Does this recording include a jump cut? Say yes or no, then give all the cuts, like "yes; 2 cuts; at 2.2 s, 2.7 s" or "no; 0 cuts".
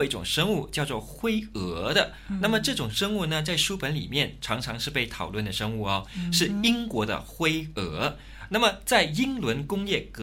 no; 0 cuts